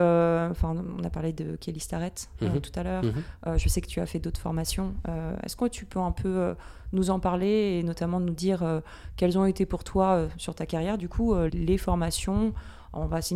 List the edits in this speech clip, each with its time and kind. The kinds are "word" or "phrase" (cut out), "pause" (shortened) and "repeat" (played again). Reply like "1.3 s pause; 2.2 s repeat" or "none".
11.5 s word